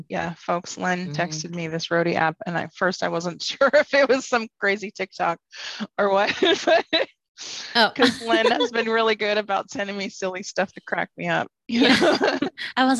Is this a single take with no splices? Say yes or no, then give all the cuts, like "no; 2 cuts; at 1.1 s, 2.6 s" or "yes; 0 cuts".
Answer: yes; 0 cuts